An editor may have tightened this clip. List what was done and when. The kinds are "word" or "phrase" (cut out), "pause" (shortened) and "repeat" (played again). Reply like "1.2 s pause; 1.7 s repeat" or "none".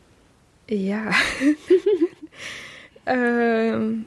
none